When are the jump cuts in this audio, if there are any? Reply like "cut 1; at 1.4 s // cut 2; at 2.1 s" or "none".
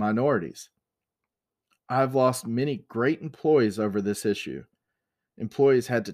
none